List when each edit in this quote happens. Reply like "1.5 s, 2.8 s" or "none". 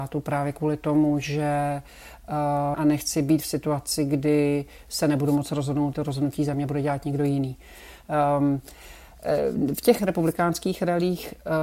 2.7 s, 5.9 s, 10.0 s